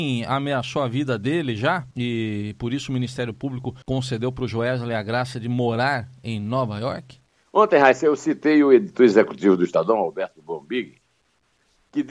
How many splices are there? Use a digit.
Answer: 3